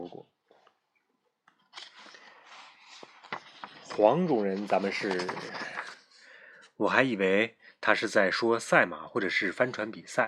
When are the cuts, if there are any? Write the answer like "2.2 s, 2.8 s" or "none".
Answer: none